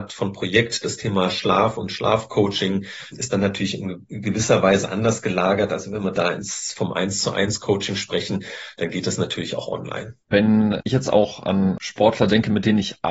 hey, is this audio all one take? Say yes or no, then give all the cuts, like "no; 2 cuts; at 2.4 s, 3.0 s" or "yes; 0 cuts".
no; 2 cuts; at 3.1 s, 10.2 s